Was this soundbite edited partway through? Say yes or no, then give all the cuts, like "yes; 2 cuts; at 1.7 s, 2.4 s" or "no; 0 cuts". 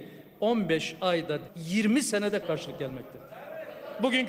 yes; 2 cuts; at 1.5 s, 2.4 s